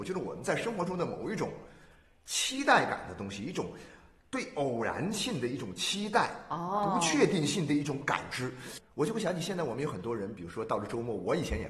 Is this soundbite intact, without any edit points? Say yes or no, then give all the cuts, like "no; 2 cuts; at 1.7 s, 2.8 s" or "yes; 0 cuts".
yes; 0 cuts